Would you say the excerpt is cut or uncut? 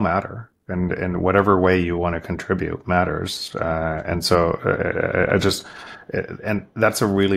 uncut